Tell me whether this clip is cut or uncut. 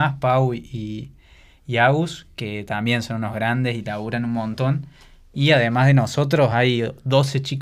uncut